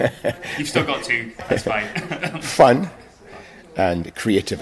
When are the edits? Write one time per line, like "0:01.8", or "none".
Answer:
none